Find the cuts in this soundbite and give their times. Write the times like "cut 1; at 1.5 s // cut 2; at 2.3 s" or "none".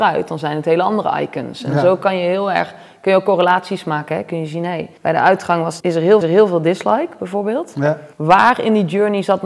cut 1; at 5.0 s // cut 2; at 5.8 s // cut 3; at 6.2 s // cut 4; at 8.1 s